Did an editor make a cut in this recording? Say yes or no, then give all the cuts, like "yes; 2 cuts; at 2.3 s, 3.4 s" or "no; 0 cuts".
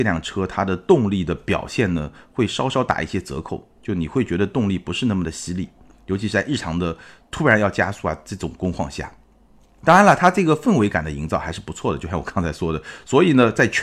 no; 0 cuts